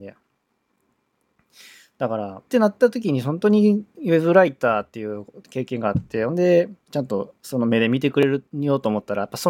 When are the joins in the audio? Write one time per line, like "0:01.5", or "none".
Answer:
0:02.5
0:06.8
0:08.5

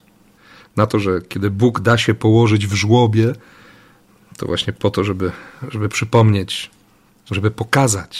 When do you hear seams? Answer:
none

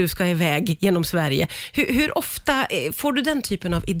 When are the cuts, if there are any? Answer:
none

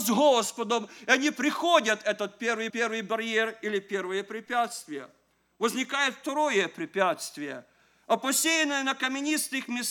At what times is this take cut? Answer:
0:02.7

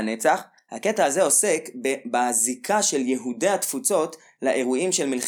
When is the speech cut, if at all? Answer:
none

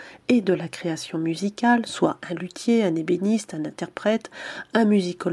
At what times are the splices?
none

